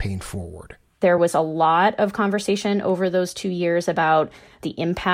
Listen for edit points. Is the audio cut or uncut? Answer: uncut